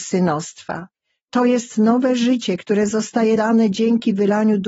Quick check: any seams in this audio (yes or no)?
yes